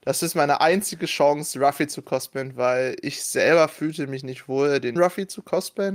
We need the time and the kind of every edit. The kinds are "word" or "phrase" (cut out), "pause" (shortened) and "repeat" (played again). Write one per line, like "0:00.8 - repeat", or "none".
0:05.0 - word